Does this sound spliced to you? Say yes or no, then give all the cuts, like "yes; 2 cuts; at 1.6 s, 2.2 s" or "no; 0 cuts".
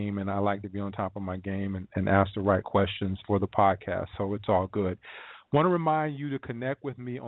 yes; 1 cut; at 3.2 s